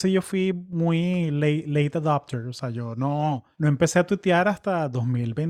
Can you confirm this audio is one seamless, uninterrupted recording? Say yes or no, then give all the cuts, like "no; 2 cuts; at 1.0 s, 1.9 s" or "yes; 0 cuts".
no; 1 cut; at 3.5 s